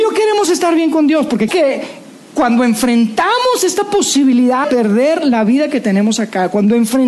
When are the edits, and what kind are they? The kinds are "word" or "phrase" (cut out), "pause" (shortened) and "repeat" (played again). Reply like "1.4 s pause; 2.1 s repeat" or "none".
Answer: 1.5 s word; 4.6 s word